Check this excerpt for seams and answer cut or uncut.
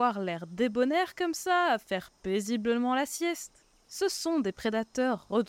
uncut